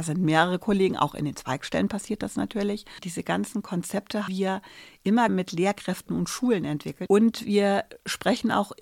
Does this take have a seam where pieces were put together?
yes; 2 cuts; at 4.3 s, 5.3 s

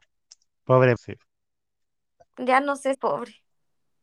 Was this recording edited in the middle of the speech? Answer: yes; 2 cuts; at 1.0 s, 2.9 s

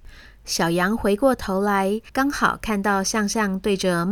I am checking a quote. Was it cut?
yes; 1 cut; at 2.1 s

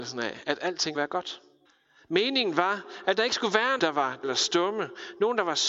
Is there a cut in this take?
yes; 4 cuts; at 0.9 s, 1.6 s, 3.8 s, 4.2 s

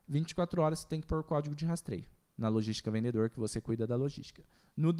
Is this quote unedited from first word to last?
yes; 0 cuts

